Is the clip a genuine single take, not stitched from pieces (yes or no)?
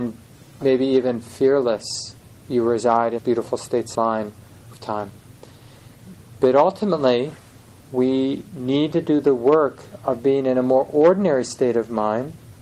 no